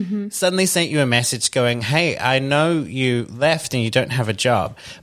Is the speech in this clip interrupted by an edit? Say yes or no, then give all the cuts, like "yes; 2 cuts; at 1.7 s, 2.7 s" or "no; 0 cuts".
no; 0 cuts